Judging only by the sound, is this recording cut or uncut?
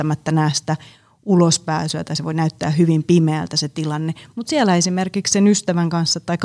uncut